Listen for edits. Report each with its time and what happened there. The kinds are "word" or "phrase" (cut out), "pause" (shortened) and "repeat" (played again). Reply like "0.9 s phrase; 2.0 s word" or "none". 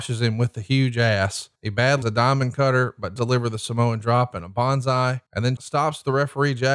1.6 s pause; 2.0 s word; 3.2 s word; 5.3 s pause; 5.6 s word